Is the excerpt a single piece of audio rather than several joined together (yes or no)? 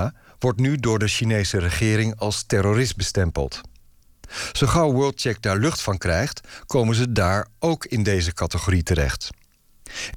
yes